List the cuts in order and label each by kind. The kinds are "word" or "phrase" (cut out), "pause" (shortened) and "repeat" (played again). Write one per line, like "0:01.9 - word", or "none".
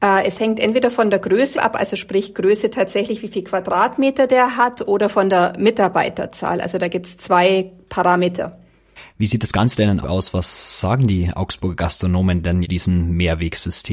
0:01.5 - phrase
0:10.0 - word
0:12.6 - word

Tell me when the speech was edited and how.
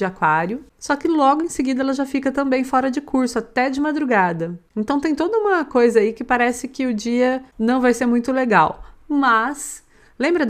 none

